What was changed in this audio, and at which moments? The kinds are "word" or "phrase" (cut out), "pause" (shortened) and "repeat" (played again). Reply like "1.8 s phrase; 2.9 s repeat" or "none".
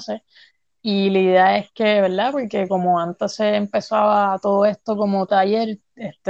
5.3 s word